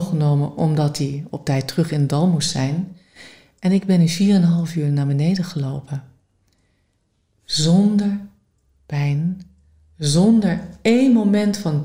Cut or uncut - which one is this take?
uncut